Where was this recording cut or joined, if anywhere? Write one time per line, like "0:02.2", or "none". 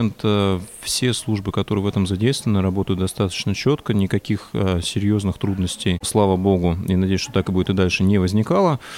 none